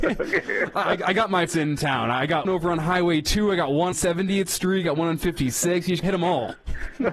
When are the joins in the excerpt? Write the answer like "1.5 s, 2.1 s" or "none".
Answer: 1.5 s, 2.4 s, 3.9 s, 6.0 s